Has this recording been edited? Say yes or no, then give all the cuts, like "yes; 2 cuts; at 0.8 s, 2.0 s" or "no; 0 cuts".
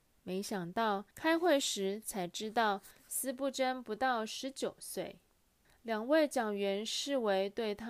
yes; 2 cuts; at 1.1 s, 5.6 s